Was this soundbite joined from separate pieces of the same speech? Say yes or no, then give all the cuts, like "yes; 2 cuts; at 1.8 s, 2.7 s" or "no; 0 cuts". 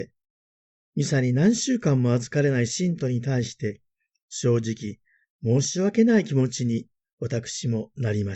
no; 0 cuts